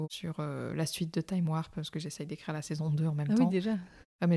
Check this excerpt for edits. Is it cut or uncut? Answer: uncut